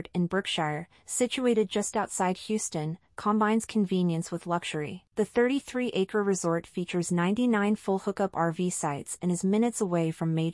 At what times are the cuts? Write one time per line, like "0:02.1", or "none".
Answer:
0:05.1